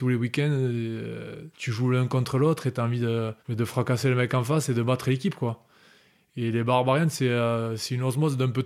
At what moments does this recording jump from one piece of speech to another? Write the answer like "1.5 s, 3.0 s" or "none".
1.5 s, 3.4 s